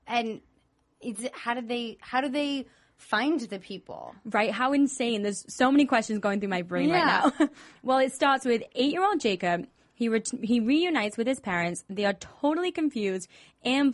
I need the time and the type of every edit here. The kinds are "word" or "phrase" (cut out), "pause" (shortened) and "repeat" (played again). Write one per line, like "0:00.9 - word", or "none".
none